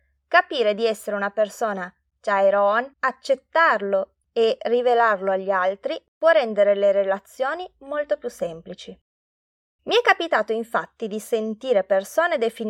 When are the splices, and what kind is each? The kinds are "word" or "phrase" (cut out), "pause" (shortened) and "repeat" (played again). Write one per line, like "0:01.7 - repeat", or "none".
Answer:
0:02.9 - pause